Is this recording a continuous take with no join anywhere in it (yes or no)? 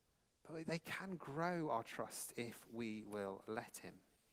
yes